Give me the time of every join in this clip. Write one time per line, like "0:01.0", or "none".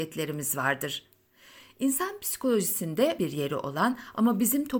0:03.2